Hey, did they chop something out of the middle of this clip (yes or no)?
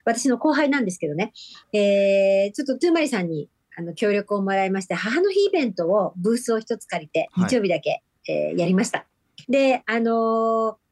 yes